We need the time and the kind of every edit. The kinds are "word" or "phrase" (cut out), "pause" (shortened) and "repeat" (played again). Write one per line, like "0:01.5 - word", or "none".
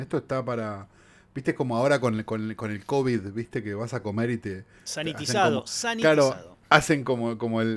none